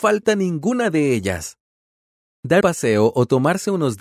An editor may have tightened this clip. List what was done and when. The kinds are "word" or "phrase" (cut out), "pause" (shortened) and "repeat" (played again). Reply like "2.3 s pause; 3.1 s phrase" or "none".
2.6 s word